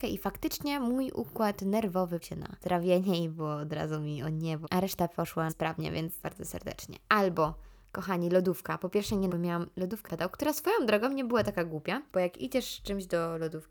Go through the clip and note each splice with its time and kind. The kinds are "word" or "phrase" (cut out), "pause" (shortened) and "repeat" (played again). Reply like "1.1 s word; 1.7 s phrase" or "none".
2.2 s word; 4.6 s word; 5.5 s word; 6.2 s word; 9.3 s word; 10.0 s word

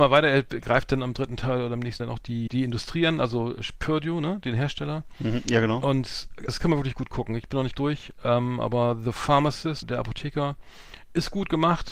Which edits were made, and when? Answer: 2.0 s word; 2.5 s word; 6.5 s word; 7.7 s word; 9.8 s word

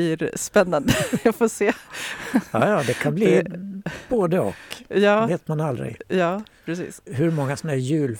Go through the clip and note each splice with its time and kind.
7.1 s phrase

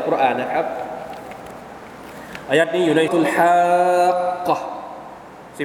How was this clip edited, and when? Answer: 3.1 s word

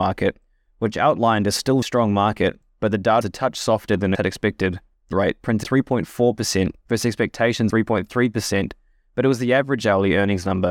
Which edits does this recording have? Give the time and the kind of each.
1.8 s word; 3.2 s word; 4.1 s word; 5.1 s word; 5.6 s word; 7.7 s word

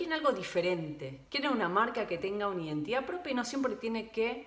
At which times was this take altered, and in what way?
1.3 s pause

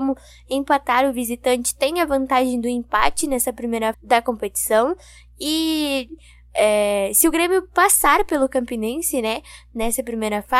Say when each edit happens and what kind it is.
3.9 s word

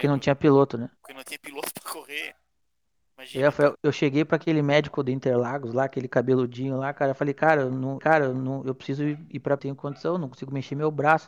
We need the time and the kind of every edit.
1.0 s pause; 3.7 s word; 8.0 s repeat; 9.6 s phrase

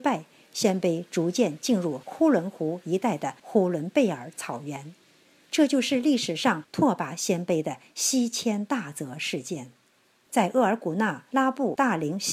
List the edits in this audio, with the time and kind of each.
none

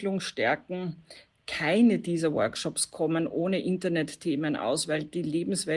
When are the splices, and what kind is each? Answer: none

